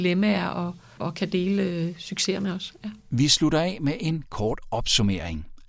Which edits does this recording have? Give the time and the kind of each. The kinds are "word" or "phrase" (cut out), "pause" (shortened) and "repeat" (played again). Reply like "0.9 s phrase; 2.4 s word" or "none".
1.0 s word; 3.0 s pause

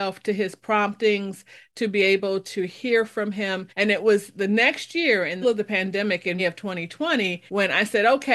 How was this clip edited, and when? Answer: 3.7 s pause; 5.4 s word; 6.4 s word; 7.5 s pause

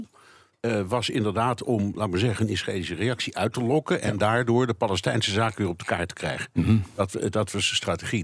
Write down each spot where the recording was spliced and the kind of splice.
none

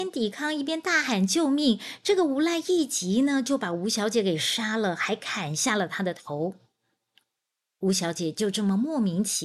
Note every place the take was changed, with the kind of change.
none

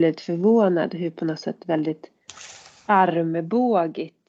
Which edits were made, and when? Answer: none

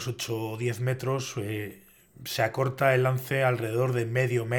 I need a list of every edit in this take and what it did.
none

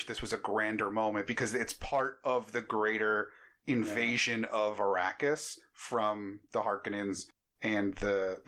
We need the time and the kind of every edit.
none

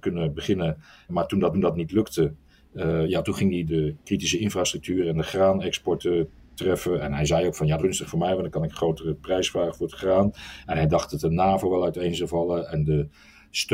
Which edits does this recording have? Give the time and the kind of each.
1.1 s word; 1.5 s repeat; 3.7 s word; 7.8 s word

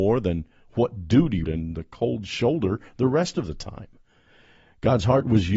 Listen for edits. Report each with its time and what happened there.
1.4 s word

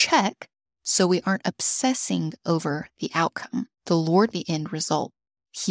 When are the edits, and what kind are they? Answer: 4.3 s phrase

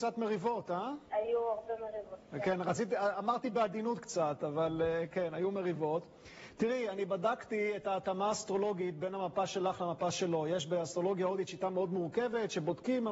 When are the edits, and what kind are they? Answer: 1.1 s pause

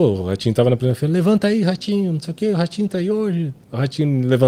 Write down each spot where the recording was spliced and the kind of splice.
none

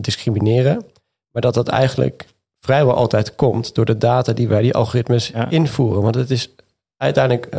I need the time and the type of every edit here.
none

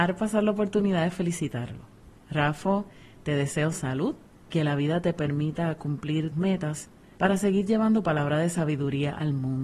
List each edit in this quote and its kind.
4.5 s word; 6.3 s word

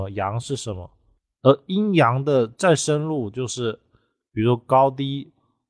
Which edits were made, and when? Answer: 2.5 s pause

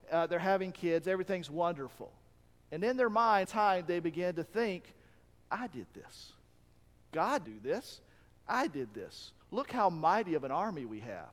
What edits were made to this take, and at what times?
3.4 s word; 7.4 s word; 9.4 s pause

